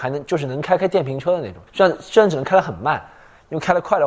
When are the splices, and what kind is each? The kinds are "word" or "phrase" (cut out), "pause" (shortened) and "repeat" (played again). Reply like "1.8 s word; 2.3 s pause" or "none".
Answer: 1.7 s pause